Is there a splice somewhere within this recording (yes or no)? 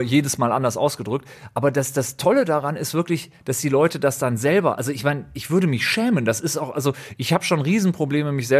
no